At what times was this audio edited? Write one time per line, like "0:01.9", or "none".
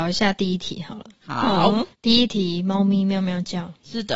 0:01.9